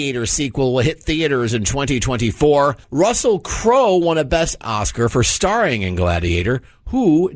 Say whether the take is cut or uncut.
cut